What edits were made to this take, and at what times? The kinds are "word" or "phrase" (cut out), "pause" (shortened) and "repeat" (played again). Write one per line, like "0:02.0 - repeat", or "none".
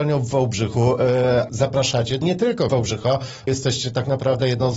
0:01.5 - word
0:02.2 - word
0:02.7 - word
0:03.5 - word